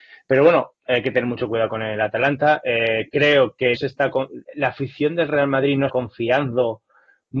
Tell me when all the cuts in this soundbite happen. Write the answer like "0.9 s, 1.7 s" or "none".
3.8 s, 4.4 s, 5.9 s